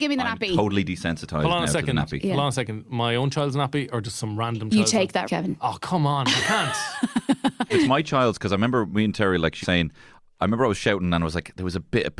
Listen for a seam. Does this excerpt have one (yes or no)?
yes